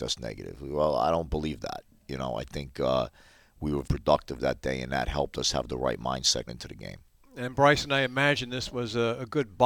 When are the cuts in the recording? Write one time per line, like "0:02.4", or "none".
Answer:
0:03.8
0:06.5